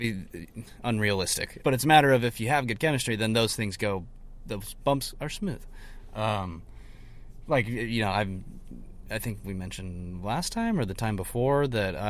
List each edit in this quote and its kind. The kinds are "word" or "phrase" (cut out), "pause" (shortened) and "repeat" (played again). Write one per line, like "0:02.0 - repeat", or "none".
0:01.6 - word